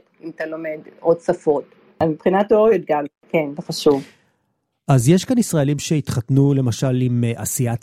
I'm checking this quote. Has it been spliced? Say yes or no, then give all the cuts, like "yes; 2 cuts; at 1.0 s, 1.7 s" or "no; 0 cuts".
no; 0 cuts